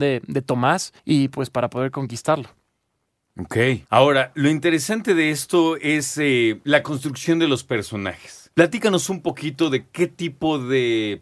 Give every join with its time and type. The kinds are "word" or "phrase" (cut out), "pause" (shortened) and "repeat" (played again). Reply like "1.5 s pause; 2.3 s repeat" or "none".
1.0 s pause; 3.9 s pause; 8.5 s pause